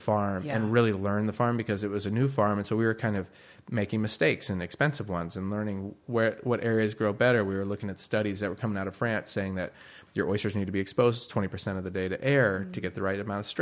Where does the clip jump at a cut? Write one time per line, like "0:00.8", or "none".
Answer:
none